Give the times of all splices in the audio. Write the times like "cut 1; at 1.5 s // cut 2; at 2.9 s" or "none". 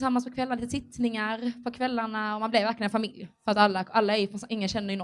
none